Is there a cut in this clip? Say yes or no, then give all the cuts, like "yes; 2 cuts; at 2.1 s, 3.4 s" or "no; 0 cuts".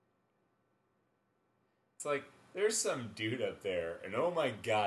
no; 0 cuts